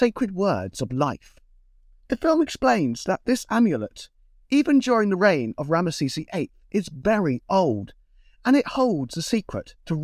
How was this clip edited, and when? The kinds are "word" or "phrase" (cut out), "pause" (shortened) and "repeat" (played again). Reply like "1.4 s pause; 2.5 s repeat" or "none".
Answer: none